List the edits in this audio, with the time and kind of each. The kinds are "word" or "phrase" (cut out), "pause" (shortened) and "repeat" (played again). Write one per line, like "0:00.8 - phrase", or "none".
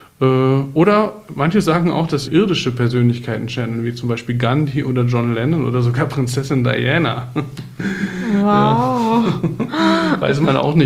0:02.2 - phrase